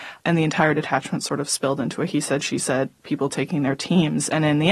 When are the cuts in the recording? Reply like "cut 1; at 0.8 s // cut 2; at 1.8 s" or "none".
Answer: none